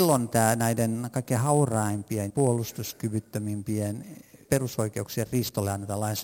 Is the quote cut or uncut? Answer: cut